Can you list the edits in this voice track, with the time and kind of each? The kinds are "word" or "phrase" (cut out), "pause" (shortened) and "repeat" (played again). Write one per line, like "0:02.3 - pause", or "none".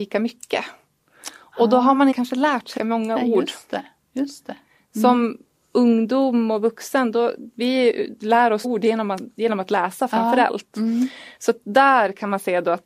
0:02.1 - word
0:02.8 - word
0:08.6 - word